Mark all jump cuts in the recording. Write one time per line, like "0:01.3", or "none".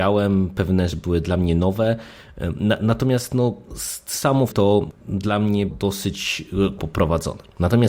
0:00.9
0:04.5
0:05.7
0:06.8

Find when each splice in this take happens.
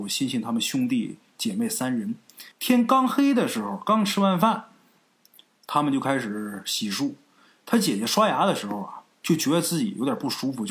0:02.5

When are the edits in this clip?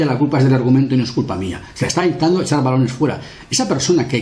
none

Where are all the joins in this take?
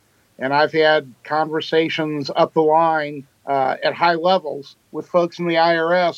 0:03.3
0:04.8

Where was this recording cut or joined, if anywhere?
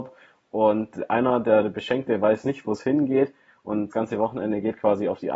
0:03.9

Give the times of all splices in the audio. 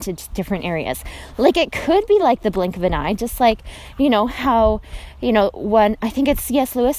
none

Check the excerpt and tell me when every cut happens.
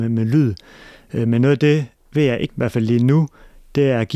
0:02.5

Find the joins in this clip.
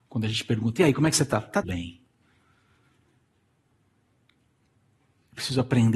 0:01.6

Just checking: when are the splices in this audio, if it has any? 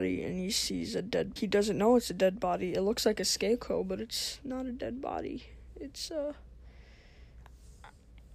0:01.4

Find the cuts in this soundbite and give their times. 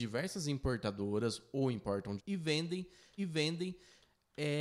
0:02.2
0:03.2

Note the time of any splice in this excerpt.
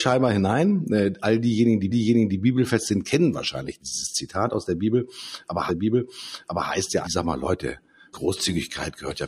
0:01.9
0:05.7
0:07.0
0:08.1

